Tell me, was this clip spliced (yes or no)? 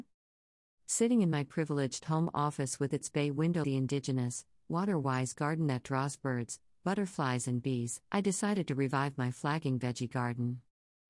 yes